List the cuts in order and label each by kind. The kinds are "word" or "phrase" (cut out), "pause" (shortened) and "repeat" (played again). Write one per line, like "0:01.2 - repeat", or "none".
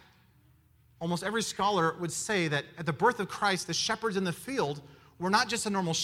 none